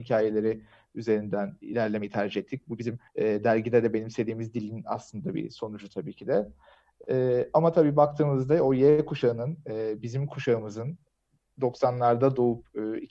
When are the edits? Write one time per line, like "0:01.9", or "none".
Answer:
0:03.1